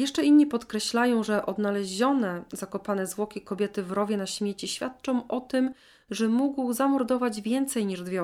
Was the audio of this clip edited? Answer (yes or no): no